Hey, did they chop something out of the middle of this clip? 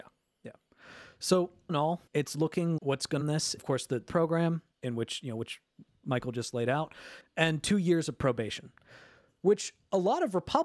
yes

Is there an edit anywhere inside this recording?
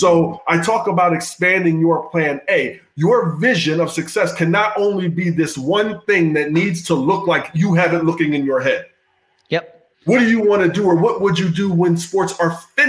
yes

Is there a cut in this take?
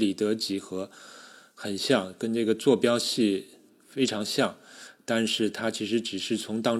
no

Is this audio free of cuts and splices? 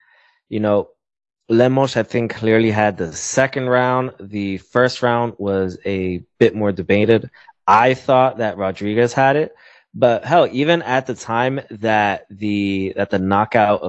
yes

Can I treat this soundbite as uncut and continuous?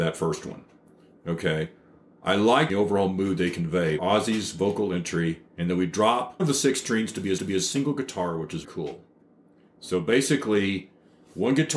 no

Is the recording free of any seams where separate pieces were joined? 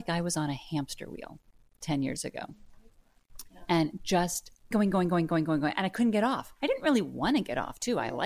no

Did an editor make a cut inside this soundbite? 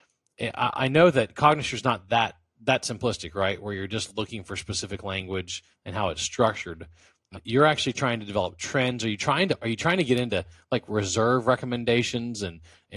no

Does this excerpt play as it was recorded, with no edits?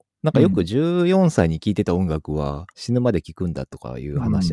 no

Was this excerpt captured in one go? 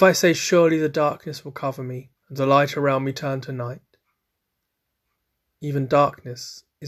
no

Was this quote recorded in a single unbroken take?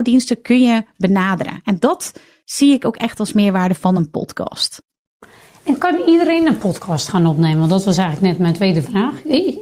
yes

